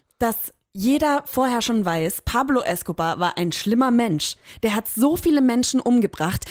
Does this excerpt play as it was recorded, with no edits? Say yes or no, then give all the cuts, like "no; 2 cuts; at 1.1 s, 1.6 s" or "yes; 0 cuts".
yes; 0 cuts